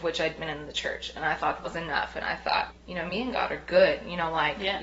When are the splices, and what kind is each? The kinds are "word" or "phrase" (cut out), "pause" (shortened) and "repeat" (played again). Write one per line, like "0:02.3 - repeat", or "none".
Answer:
0:01.6 - word
0:02.7 - word